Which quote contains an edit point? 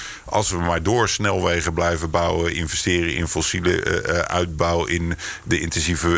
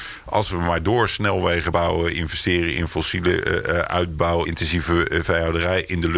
second; 2 cuts; at 1.7 s, 4.5 s

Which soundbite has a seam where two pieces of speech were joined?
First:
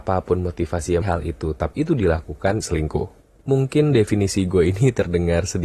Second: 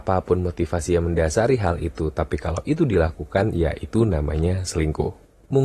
first; 3 cuts; at 1.0 s, 1.7 s, 2.6 s

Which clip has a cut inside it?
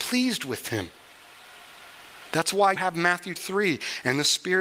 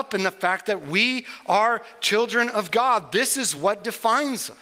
first; 2 cuts; at 2.8 s, 3.4 s

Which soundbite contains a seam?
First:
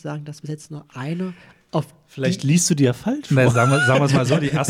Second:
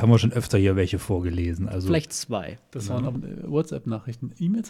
second; 1 cut; at 3.2 s

